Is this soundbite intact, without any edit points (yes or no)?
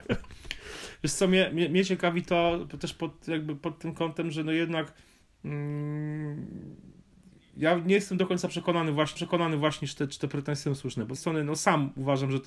no